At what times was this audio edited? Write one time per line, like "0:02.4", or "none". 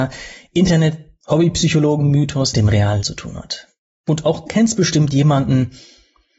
0:02.5
0:03.0
0:04.5